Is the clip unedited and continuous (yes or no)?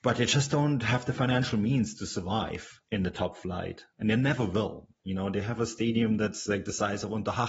no